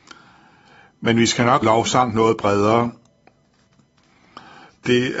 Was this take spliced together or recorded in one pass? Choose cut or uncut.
cut